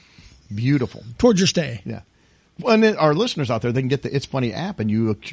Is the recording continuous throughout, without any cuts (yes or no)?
yes